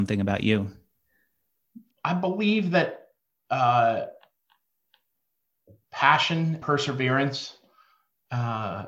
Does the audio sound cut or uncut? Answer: cut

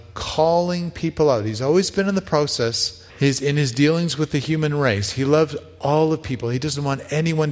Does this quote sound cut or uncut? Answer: cut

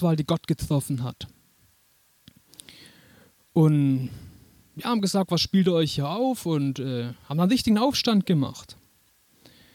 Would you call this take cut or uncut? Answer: uncut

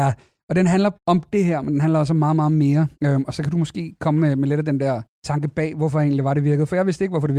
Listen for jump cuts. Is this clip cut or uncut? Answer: cut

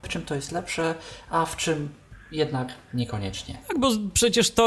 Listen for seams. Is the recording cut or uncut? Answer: uncut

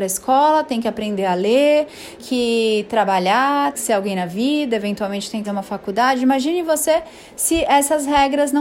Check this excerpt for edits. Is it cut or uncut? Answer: cut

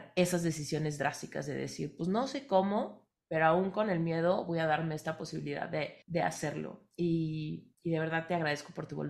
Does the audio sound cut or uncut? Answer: cut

